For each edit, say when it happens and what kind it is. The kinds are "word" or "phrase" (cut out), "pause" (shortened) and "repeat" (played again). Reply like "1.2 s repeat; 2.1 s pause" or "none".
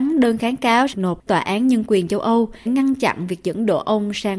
0.9 s word; 1.3 s word; 2.7 s word